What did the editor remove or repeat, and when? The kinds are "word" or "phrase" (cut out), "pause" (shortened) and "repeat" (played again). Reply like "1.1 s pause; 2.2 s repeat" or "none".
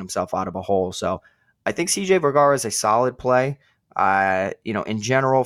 none